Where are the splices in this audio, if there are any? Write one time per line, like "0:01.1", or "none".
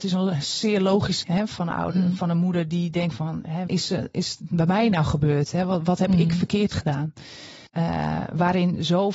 0:01.2
0:03.7
0:07.7